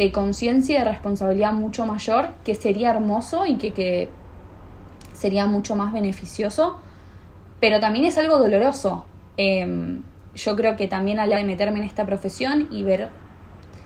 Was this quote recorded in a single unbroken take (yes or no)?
no